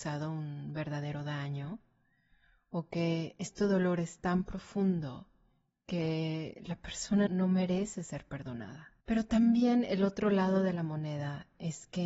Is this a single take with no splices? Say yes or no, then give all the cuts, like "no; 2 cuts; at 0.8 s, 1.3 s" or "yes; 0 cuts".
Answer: no; 2 cuts; at 7.3 s, 9.0 s